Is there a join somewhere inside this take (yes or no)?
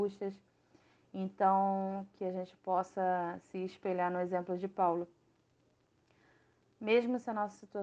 no